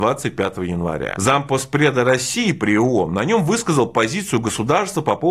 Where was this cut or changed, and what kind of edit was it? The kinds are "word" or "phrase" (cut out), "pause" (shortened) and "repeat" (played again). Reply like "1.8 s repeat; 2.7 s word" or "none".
none